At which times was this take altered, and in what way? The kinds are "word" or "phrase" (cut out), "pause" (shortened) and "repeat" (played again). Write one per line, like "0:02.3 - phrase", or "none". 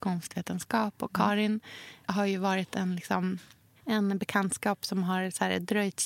none

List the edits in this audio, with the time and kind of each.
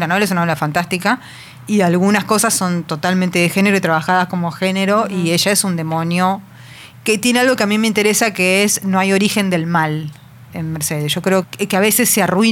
0:10.5 - word
0:11.4 - word

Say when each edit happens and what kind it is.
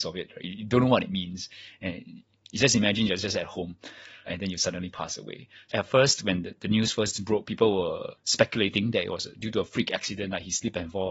0:04.3 - word
0:05.7 - word
0:08.2 - pause

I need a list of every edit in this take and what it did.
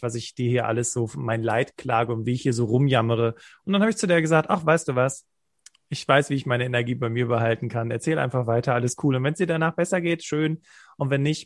none

